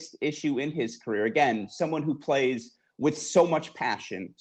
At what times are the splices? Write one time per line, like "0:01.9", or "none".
none